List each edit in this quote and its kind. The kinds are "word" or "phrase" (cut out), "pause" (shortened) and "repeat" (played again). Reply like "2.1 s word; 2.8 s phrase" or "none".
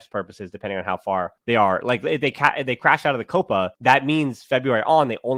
1.4 s pause; 3.7 s pause